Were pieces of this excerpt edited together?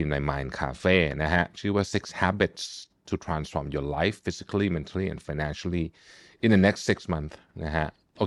no; 0 cuts

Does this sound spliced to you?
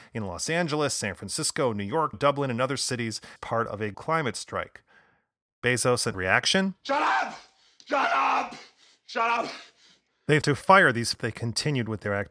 yes; 6 cuts; at 2.1 s, 3.4 s, 3.9 s, 6.1 s, 10.4 s, 11.1 s

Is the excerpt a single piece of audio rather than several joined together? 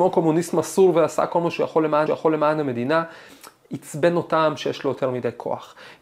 no; 1 cut; at 2.1 s

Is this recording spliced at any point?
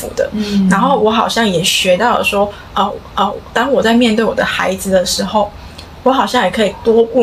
yes; 1 cut; at 3.1 s

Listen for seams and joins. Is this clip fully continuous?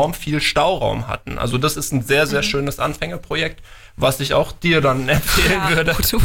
yes; 0 cuts

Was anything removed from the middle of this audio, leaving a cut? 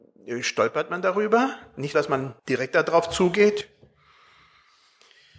yes; 2 cuts; at 1.9 s, 2.4 s

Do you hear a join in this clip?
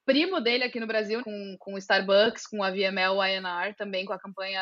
yes; 1 cut; at 1.2 s

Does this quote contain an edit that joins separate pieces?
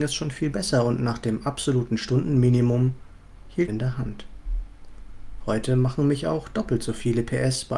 yes; 1 cut; at 3.7 s

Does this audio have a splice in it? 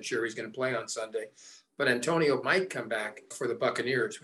yes; 2 cuts; at 2.4 s, 3.3 s

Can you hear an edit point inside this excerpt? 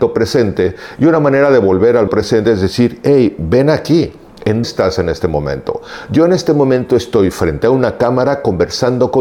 yes; 2 cuts; at 2.1 s, 4.6 s

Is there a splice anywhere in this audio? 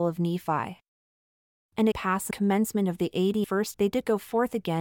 yes; 4 cuts; at 1.9 s, 2.3 s, 3.4 s, 3.7 s

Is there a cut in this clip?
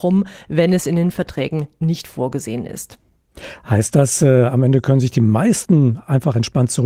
no; 0 cuts

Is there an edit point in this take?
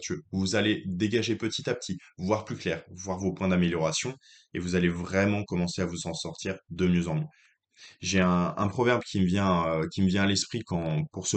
no; 0 cuts

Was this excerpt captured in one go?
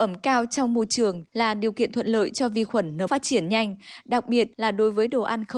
no; 3 cuts; at 1.3 s, 3.1 s, 4.5 s

